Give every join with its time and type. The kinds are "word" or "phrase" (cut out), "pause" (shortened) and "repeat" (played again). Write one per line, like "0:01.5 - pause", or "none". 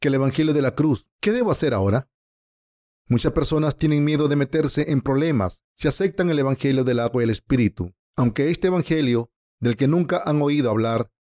0:01.1 - pause
0:05.7 - pause
0:08.0 - pause